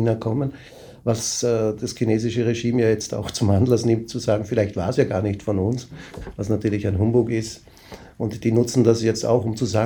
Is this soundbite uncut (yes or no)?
yes